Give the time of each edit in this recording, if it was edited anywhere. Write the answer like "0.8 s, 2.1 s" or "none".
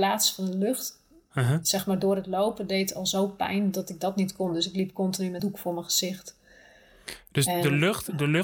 5.4 s